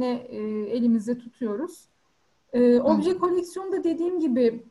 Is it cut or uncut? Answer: cut